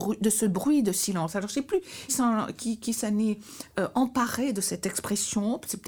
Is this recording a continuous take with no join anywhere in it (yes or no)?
no